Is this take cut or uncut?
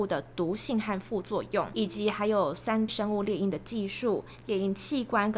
cut